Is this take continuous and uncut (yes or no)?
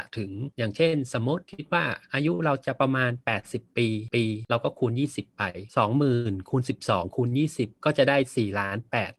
no